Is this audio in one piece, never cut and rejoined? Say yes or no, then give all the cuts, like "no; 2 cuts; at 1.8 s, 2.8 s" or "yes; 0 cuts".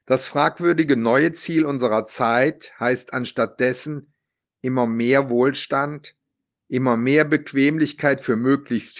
yes; 0 cuts